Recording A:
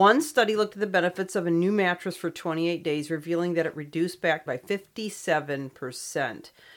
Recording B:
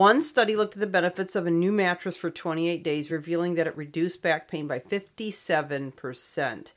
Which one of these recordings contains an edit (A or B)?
A